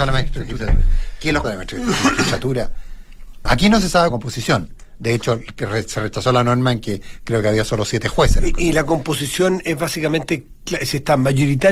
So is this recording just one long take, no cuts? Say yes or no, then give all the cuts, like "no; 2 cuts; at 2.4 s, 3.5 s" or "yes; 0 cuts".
no; 3 cuts; at 1.4 s, 3.5 s, 4.1 s